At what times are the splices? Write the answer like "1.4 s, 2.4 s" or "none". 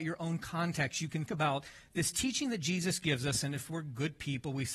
1.3 s